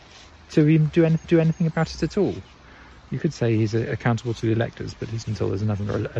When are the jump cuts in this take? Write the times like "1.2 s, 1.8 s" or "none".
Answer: 1.2 s, 5.2 s

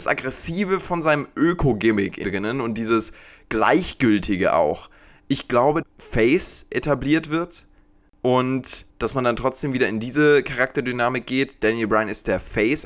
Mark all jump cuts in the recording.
2.2 s, 5.8 s, 8.9 s

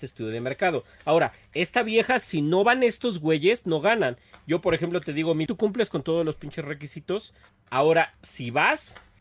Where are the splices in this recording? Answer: 5.5 s

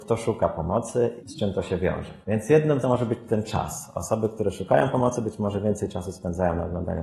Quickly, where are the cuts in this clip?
1.2 s, 2.2 s, 2.8 s

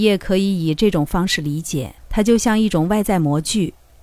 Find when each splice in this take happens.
2.0 s

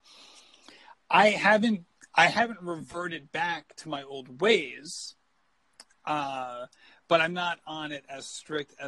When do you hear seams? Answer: none

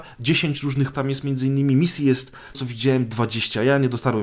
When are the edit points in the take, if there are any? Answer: 0.9 s, 2.5 s

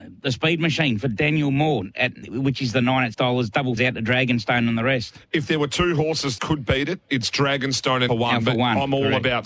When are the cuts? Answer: 2.2 s, 3.1 s, 3.8 s, 6.4 s, 7.1 s, 8.1 s

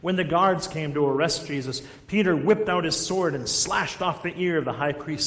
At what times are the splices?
none

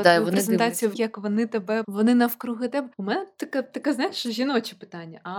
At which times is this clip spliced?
0.9 s, 1.8 s, 2.9 s

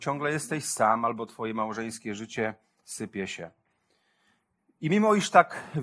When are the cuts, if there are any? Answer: none

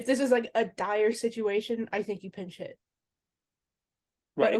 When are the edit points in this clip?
none

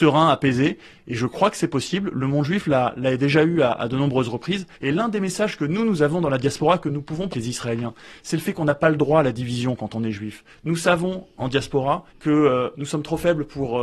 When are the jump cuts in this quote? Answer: 4.7 s, 7.3 s, 12.1 s

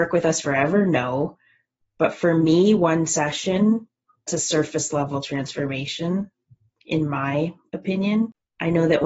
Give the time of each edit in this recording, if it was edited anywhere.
4.3 s

